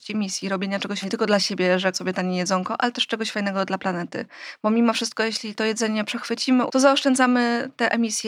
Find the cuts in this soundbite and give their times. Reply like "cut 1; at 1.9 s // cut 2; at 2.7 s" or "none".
cut 1; at 1.0 s // cut 2; at 1.9 s // cut 3; at 6.7 s